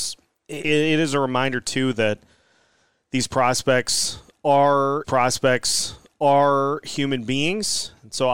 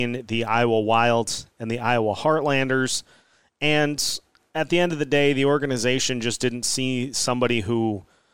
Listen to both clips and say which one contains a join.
first; 1 cut; at 5.0 s

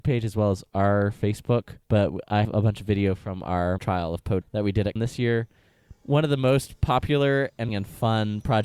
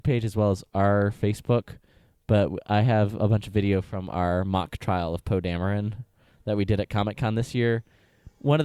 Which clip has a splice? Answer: first; 6 cuts; at 1.8 s, 2.4 s, 3.8 s, 4.4 s, 5.0 s, 7.7 s

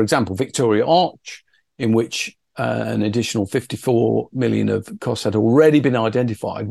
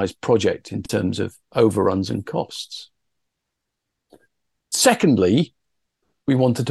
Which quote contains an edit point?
second; 1 cut; at 1.5 s

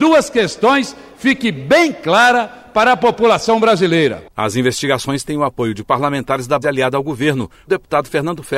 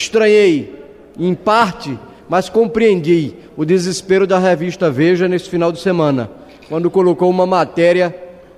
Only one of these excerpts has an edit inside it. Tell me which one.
first; 3 cuts; at 5.2 s, 6.6 s, 7.7 s

